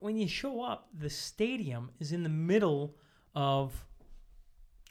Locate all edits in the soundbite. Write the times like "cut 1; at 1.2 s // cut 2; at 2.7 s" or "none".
none